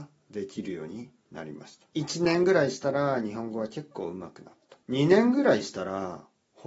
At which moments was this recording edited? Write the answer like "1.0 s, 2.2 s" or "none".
1.9 s, 4.8 s